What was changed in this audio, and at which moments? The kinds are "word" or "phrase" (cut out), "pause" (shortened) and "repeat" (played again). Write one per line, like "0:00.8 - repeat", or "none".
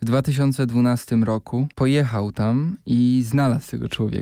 0:01.7 - pause